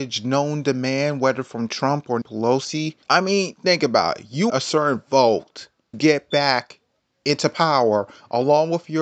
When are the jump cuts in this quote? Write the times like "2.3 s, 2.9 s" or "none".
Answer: 2.2 s, 3.0 s, 4.5 s, 5.9 s, 7.0 s